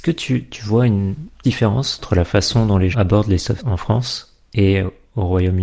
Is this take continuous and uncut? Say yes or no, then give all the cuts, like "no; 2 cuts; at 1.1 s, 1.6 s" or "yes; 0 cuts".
no; 3 cuts; at 1.4 s, 2.9 s, 3.6 s